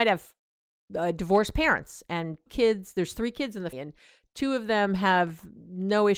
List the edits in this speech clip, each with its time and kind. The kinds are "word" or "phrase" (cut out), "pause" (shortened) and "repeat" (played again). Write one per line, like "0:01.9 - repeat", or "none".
0:02.5 - word
0:03.7 - word